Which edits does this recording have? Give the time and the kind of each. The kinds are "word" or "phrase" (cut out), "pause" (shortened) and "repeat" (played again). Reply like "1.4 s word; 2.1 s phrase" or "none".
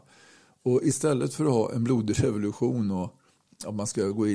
none